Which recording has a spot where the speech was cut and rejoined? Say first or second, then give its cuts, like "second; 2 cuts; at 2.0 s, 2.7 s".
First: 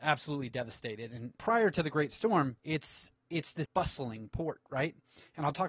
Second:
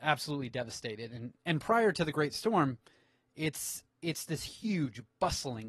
first; 3 cuts; at 1.4 s, 2.6 s, 3.7 s